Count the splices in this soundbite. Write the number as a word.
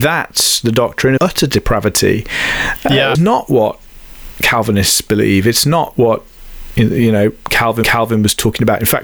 three